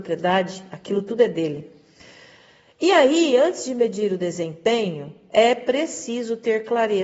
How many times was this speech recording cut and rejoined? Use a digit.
0